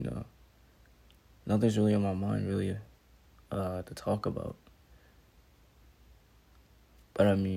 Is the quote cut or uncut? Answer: uncut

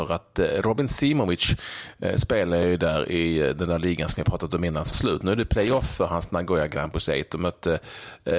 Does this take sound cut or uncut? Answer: cut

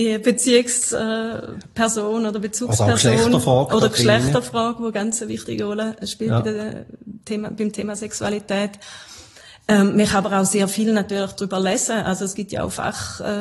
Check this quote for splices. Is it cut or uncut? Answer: uncut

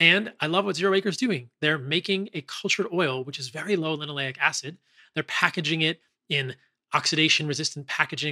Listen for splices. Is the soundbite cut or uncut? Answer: uncut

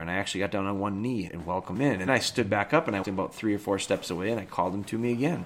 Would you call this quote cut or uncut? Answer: cut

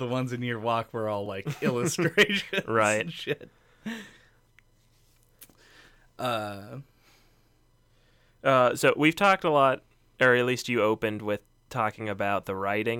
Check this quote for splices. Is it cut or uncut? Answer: uncut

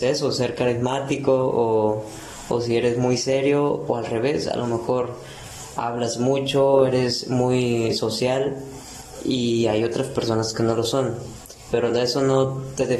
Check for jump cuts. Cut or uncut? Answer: uncut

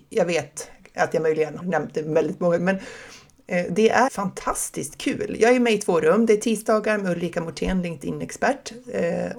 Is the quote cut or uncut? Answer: cut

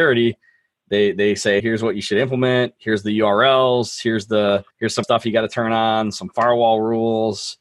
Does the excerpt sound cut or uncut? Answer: cut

